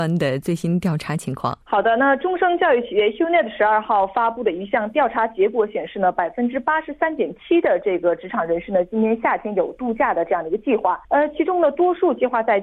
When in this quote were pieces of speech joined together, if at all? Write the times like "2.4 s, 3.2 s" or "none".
1.6 s, 11.0 s